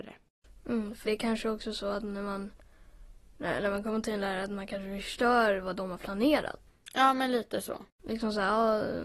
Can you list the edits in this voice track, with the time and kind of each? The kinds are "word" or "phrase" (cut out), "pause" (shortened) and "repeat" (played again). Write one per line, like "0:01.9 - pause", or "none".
0:01.0 - word